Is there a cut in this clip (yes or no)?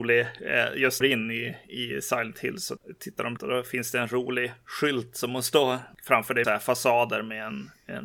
yes